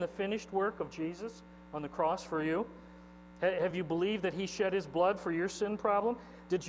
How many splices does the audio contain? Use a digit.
0